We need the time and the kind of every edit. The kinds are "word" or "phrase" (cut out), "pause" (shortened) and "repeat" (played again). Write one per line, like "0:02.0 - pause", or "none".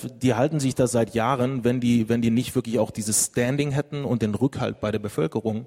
none